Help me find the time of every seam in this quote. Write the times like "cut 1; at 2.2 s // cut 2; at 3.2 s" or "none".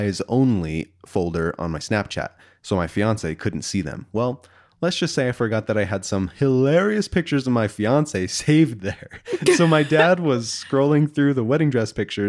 none